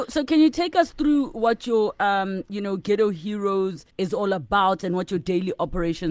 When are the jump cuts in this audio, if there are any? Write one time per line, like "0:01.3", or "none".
0:03.9